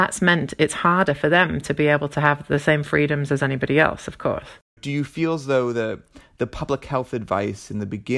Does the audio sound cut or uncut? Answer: uncut